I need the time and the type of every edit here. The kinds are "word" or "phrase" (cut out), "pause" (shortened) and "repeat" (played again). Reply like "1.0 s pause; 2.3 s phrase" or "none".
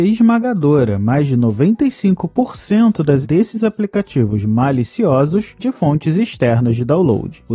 3.2 s word; 5.6 s word